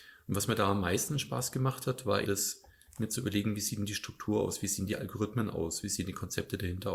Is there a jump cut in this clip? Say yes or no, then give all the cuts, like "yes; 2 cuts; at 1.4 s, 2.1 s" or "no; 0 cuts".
yes; 1 cut; at 2.2 s